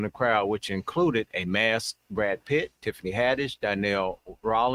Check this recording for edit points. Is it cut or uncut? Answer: cut